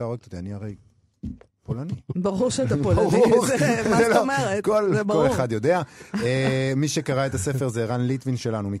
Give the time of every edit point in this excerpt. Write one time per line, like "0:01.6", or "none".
none